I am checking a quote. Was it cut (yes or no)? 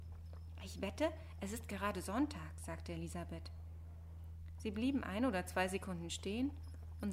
no